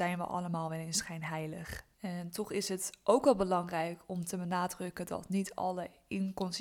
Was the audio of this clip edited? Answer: yes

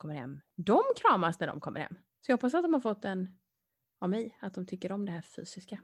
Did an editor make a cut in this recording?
no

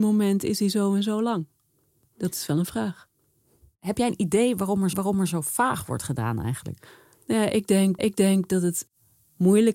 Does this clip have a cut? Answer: yes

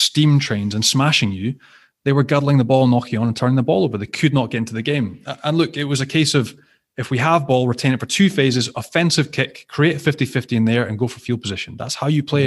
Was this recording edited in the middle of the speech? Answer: no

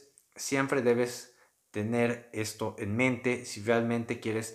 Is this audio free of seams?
yes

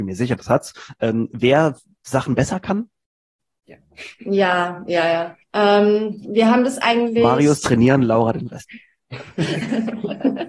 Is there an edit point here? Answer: yes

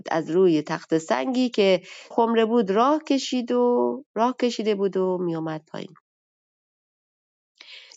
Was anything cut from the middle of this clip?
yes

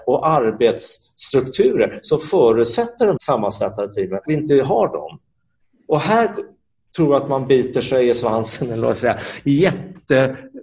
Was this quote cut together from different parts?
yes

